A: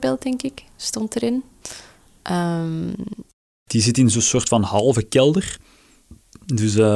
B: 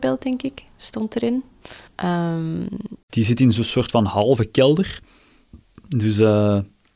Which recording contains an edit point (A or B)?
B